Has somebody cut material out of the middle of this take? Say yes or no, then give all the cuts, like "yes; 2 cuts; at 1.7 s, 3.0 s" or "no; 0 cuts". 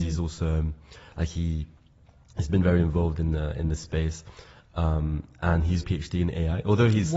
yes; 1 cut; at 5.8 s